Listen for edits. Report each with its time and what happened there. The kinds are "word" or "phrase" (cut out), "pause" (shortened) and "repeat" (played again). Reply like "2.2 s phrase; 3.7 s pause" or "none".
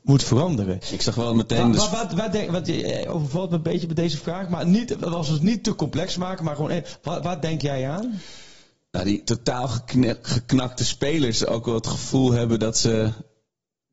none